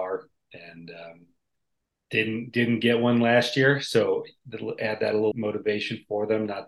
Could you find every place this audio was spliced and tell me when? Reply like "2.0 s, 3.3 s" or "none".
5.3 s